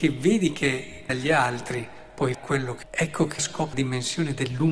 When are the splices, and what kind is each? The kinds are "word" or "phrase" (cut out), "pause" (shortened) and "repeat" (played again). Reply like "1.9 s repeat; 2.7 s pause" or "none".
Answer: 1.1 s word; 2.3 s word; 2.8 s word; 3.4 s word; 3.7 s word